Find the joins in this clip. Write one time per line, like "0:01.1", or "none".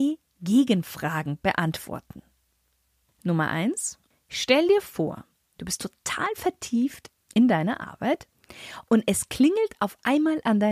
none

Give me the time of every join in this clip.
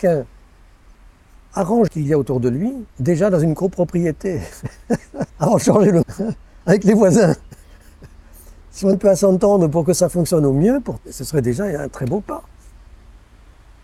0:01.9
0:02.9
0:05.3
0:06.0
0:08.9
0:11.0

